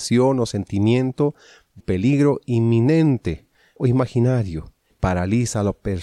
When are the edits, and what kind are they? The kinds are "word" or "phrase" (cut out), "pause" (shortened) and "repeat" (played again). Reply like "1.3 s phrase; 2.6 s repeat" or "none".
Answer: 1.8 s word; 3.8 s word; 4.9 s word

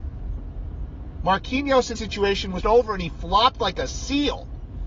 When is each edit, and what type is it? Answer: 2.0 s word; 2.6 s word

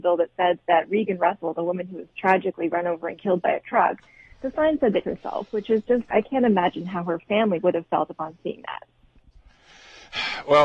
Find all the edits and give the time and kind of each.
5.0 s phrase; 6.1 s word

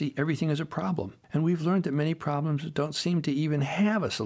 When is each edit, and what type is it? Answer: 1.2 s pause

